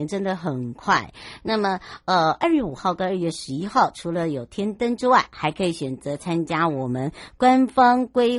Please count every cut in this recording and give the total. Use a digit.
0